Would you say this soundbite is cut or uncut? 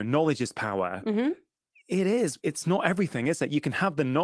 cut